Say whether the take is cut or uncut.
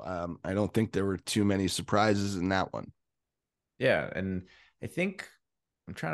uncut